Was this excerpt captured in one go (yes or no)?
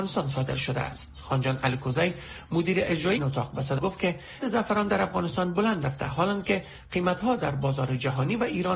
no